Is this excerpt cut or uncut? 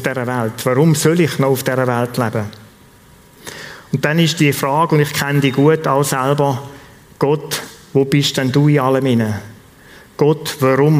uncut